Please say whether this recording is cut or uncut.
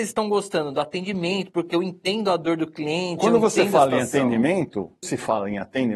cut